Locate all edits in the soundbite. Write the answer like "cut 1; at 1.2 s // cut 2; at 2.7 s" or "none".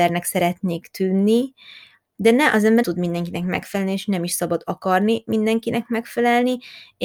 cut 1; at 2.8 s